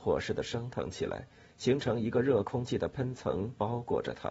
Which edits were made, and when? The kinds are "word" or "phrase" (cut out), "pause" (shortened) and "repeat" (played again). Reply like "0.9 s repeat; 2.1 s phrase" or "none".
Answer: none